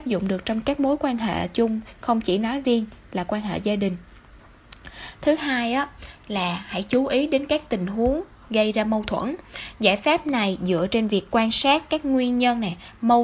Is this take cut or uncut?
uncut